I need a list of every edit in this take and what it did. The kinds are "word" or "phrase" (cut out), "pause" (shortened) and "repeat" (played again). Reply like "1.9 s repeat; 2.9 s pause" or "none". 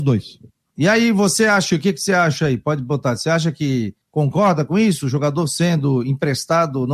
4.0 s pause